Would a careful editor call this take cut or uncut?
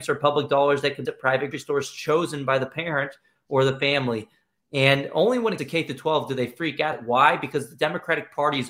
cut